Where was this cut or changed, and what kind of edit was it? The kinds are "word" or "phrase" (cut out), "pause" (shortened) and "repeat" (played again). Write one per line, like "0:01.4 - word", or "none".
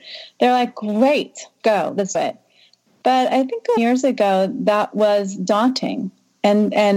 0:01.6 - word
0:02.1 - word
0:03.8 - word